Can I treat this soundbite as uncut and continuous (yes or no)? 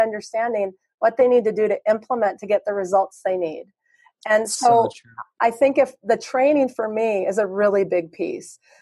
yes